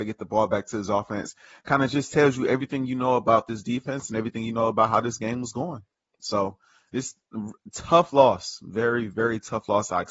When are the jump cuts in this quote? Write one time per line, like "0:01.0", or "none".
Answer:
none